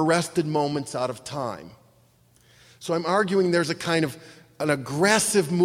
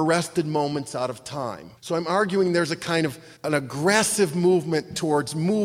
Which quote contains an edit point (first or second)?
second